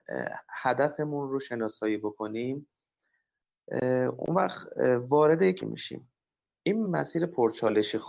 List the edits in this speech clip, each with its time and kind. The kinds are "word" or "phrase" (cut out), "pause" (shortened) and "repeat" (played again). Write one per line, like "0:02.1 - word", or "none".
0:05.6 - word
0:06.8 - word